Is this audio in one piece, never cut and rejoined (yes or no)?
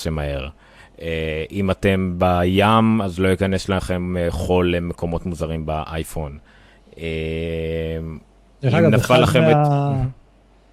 yes